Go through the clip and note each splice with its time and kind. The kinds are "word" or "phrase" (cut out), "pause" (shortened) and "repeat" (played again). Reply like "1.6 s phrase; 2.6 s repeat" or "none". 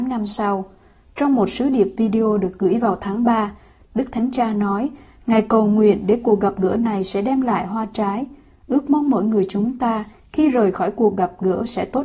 none